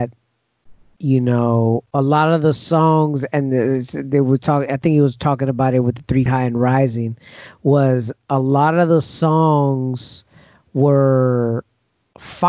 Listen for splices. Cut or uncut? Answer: cut